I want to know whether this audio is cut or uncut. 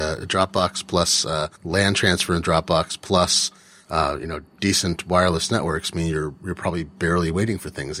cut